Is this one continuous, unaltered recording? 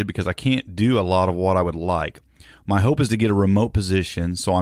yes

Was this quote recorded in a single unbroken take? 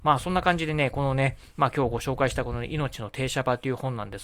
yes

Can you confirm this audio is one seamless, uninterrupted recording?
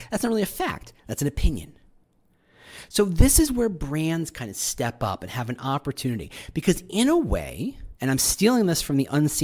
no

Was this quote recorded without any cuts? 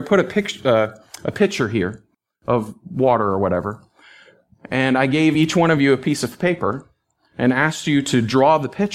yes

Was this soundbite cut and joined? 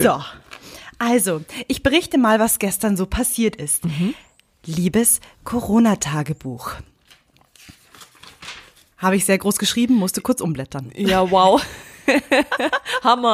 no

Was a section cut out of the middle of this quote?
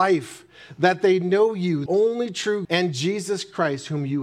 yes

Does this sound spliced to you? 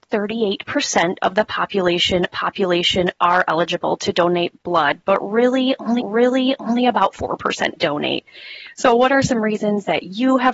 yes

